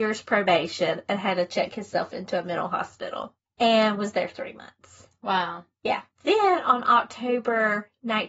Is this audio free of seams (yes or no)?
no